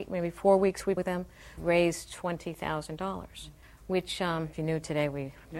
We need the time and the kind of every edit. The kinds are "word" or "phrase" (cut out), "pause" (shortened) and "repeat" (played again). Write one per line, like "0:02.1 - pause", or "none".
0:01.0 - phrase
0:01.6 - word
0:03.6 - pause
0:04.5 - phrase

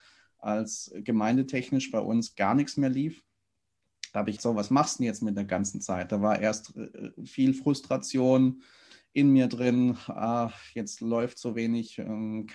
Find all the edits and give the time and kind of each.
0:02.3 - word
0:04.4 - phrase

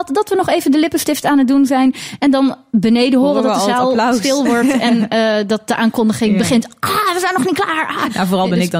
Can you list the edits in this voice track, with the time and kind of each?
none

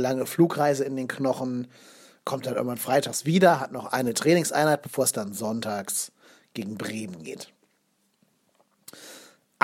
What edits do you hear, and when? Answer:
none

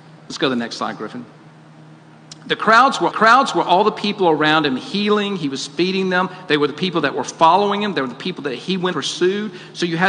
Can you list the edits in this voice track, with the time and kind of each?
0:03.1 - repeat
0:08.9 - word

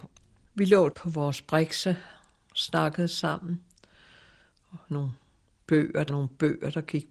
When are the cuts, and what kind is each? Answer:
0:00.9 - word
0:04.8 - word
0:06.1 - word

